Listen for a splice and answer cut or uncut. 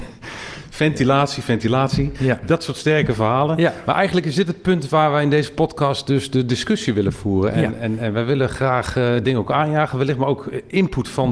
uncut